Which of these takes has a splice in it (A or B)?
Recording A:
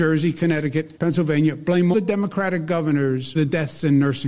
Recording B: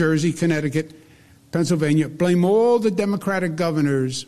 A